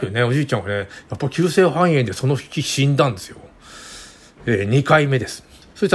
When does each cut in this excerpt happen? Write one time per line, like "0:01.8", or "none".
none